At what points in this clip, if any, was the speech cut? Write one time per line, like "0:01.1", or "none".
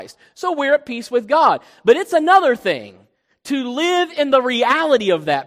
none